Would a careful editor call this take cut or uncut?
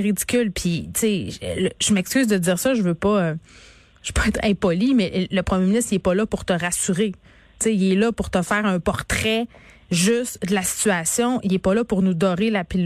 uncut